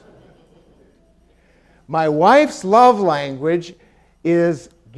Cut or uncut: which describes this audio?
uncut